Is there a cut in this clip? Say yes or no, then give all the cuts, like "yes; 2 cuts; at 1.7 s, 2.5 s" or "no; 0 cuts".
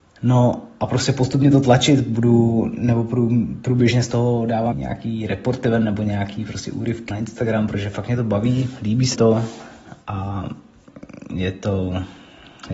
yes; 3 cuts; at 4.7 s, 7.1 s, 9.1 s